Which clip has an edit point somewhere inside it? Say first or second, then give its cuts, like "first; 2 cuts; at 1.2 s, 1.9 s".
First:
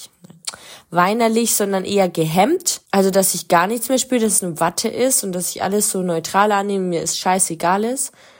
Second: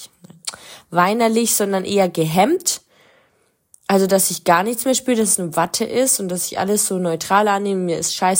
first; 1 cut; at 2.9 s